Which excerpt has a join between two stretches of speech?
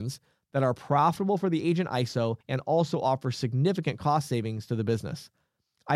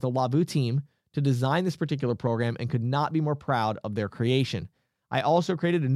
first; 1 cut; at 2.4 s

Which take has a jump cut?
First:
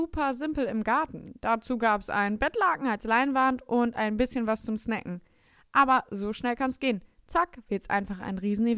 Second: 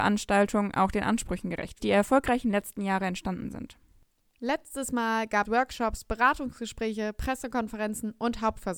second; 2 cuts; at 1.8 s, 5.4 s

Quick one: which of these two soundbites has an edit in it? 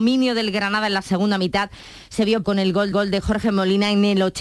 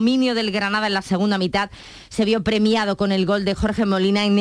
first; 2 cuts; at 2.4 s, 2.9 s

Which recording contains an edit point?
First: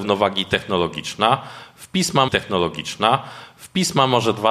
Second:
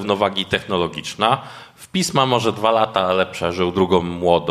first; 1 cut; at 2.3 s

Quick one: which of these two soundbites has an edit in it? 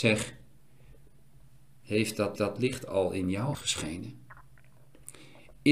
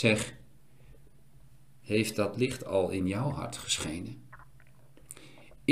first; 2 cuts; at 2.4 s, 3.5 s

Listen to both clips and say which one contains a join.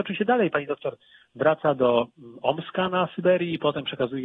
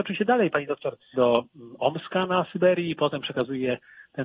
second; 1 cut; at 1.1 s

